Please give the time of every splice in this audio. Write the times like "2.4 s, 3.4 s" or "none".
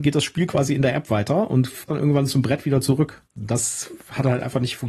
1.9 s, 3.2 s